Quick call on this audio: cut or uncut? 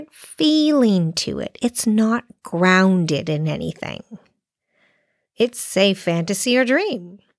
uncut